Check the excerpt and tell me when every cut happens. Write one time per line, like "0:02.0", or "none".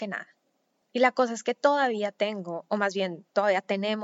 none